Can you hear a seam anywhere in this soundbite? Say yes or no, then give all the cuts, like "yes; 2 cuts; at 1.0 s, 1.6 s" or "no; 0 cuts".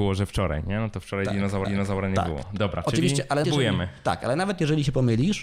yes; 2 cuts; at 1.6 s, 3.4 s